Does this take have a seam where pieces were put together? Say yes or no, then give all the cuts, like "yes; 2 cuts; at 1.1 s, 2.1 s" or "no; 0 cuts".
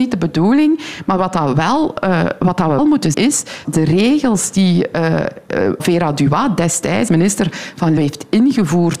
yes; 6 cuts; at 2.8 s, 3.1 s, 3.6 s, 5.8 s, 7.1 s, 8.0 s